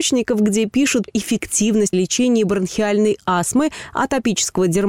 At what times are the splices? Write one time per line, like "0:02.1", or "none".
0:01.1
0:01.9